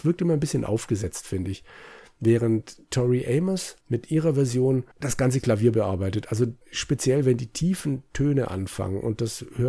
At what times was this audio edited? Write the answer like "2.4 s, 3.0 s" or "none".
3.8 s, 4.9 s, 6.6 s